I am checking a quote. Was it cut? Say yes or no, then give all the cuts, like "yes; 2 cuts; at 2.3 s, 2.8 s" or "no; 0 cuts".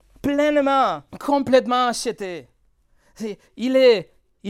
yes; 2 cuts; at 1.1 s, 3.4 s